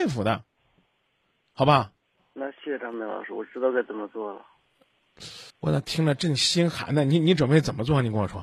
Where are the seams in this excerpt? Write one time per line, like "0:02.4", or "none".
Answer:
0:02.2
0:05.5